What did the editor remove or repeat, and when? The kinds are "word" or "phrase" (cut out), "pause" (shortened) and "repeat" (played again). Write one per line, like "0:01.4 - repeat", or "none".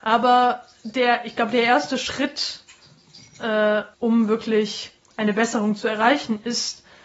0:03.9 - pause